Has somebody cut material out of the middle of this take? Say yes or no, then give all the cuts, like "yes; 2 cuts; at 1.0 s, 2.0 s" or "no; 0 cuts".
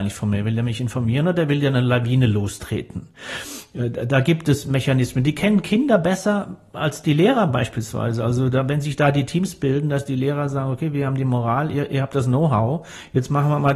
no; 0 cuts